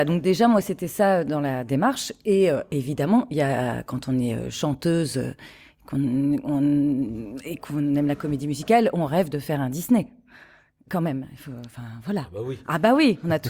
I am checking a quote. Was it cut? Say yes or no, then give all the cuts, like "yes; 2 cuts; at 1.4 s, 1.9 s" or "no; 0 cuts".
no; 0 cuts